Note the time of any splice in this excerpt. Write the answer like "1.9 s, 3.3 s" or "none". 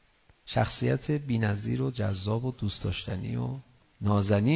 none